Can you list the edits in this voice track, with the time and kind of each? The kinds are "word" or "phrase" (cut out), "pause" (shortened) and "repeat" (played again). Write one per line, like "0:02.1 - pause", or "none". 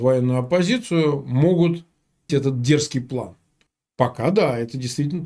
0:02.3 - word
0:03.7 - pause